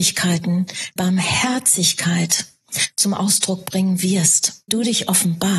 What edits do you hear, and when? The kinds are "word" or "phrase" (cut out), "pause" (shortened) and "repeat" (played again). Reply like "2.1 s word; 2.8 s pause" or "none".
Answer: 1.0 s word; 4.7 s word